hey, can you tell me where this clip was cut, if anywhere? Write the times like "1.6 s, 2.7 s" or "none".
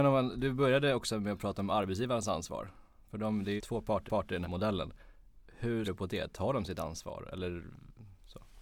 3.6 s, 4.1 s, 4.4 s, 5.8 s